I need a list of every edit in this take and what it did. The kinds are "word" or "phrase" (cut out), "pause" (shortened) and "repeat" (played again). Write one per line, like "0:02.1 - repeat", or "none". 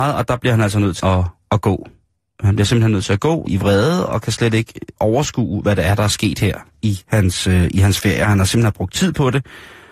0:01.0 - word
0:03.5 - word